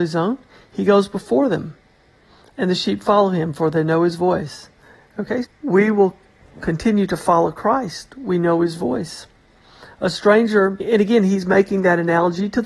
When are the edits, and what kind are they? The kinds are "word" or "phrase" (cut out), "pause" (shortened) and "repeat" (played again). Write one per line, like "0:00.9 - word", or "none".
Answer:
0:05.4 - word
0:10.8 - word